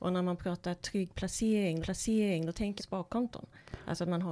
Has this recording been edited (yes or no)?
yes